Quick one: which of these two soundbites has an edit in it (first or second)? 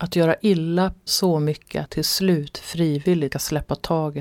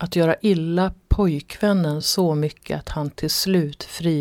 first